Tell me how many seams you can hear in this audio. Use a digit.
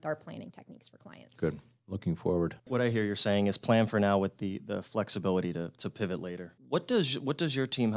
2